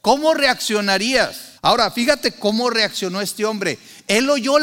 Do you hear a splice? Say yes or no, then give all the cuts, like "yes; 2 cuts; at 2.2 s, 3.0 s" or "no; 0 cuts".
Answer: yes; 1 cut; at 1.6 s